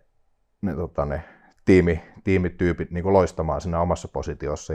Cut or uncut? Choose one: uncut